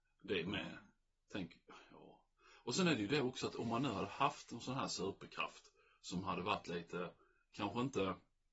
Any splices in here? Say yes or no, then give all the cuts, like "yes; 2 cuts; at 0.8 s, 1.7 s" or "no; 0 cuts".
no; 0 cuts